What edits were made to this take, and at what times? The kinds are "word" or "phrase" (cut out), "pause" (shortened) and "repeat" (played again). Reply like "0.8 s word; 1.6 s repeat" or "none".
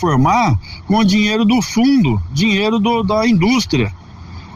none